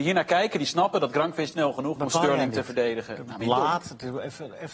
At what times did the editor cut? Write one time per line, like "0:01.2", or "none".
0:01.5
0:02.0
0:03.4